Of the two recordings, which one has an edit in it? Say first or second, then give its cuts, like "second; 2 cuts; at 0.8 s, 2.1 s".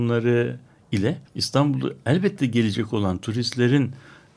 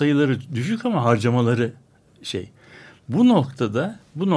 first; 1 cut; at 1.3 s